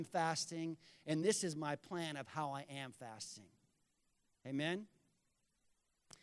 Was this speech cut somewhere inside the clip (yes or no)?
no